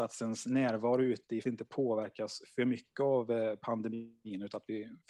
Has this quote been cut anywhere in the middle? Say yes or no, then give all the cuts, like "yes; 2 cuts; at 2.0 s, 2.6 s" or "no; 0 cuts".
yes; 1 cut; at 1.4 s